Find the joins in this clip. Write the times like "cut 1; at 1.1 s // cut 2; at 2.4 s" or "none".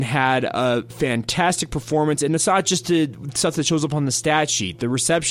none

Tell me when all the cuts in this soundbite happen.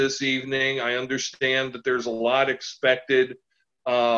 none

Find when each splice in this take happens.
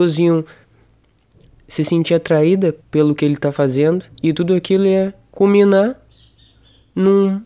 cut 1; at 2.8 s // cut 2; at 4.1 s

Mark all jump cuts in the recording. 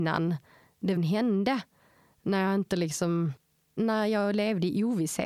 cut 1; at 1.0 s

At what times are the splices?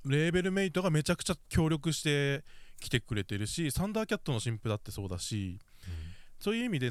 none

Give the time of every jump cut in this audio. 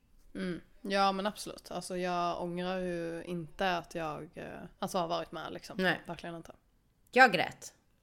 cut 1; at 4.7 s

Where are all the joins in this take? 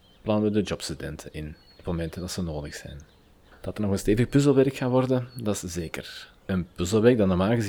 cut 1; at 1.6 s // cut 2; at 6.4 s

